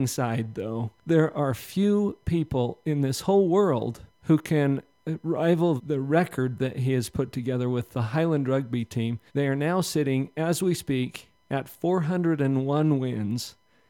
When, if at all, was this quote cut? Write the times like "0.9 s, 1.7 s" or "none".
1.0 s, 4.1 s, 5.8 s, 9.3 s